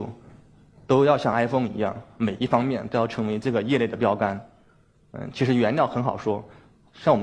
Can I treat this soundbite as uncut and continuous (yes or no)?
yes